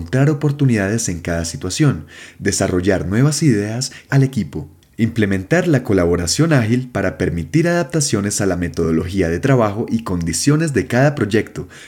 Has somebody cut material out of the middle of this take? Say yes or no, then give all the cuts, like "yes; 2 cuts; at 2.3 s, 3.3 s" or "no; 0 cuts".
yes; 1 cut; at 4.1 s